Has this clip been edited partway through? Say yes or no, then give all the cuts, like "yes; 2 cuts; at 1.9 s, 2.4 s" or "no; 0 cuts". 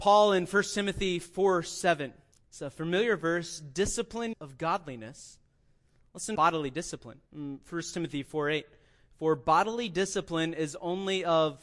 yes; 4 cuts; at 2.3 s, 4.3 s, 6.4 s, 7.3 s